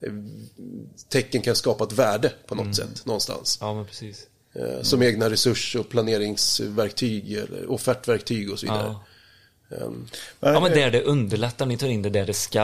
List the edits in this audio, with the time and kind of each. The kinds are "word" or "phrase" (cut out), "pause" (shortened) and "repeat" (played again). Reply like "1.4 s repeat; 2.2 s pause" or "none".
none